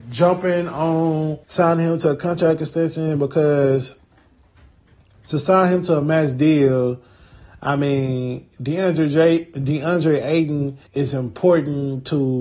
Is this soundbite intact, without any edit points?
no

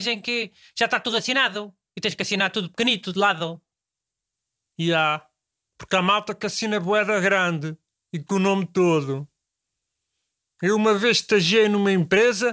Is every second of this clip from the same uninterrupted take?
yes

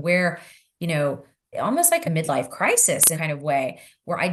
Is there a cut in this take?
yes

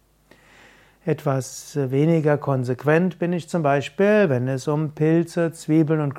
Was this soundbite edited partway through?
no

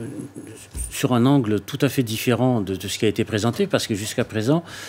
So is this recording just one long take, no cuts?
yes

